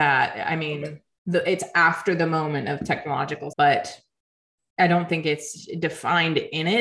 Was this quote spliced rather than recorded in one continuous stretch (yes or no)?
yes